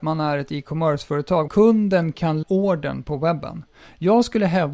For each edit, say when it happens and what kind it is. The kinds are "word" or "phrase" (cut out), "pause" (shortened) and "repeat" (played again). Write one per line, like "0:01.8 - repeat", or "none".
0:01.5 - phrase
0:02.4 - word